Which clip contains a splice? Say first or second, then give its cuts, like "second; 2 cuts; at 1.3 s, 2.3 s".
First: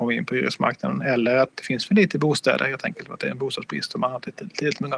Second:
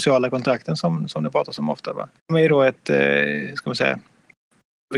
second; 1 cut; at 2.2 s